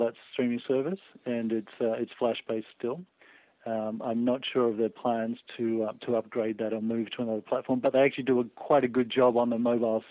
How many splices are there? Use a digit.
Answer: 0